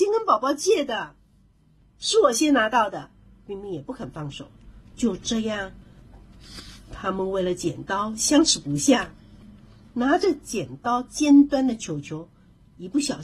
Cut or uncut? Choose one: uncut